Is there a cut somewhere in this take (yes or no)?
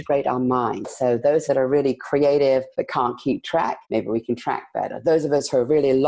yes